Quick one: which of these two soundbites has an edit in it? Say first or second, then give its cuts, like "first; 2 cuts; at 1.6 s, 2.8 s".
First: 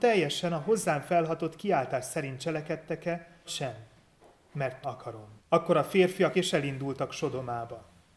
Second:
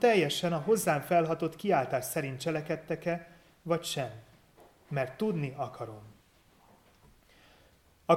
first; 4 cuts; at 3.5 s, 4.8 s, 5.4 s, 6.3 s